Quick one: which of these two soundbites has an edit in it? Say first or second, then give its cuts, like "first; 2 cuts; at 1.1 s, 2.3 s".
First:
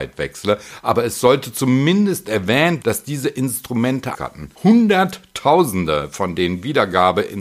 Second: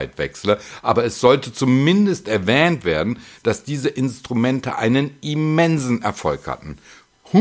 first; 3 cuts; at 2.8 s, 4.1 s, 4.6 s